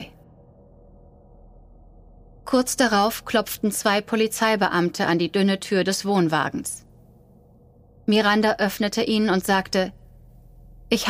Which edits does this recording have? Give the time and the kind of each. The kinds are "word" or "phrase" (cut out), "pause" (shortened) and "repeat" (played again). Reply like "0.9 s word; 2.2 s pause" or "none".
none

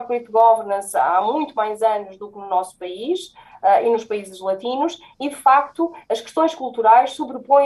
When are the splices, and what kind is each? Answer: none

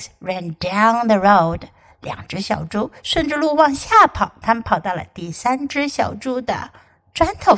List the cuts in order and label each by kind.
none

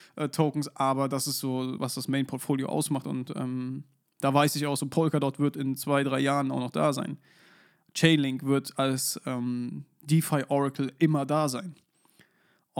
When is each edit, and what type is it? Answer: 1.8 s word

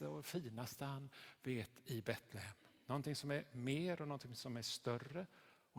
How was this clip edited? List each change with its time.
none

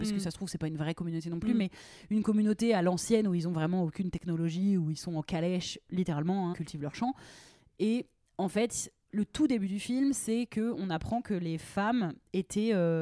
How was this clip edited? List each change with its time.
6.5 s word

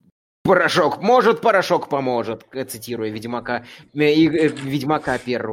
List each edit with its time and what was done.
none

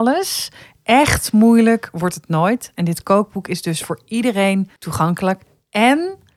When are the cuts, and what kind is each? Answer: 4.8 s pause

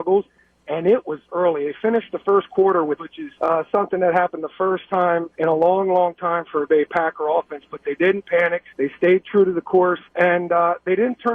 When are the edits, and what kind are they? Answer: 1.3 s word; 3.0 s phrase; 3.4 s pause; 5.3 s pause; 6.7 s word; 8.7 s pause; 10.1 s pause

